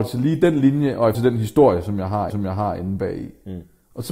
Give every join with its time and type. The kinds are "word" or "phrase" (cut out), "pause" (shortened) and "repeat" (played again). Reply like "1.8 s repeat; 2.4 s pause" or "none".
1.1 s word; 2.3 s repeat